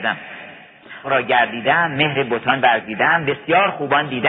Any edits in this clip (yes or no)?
yes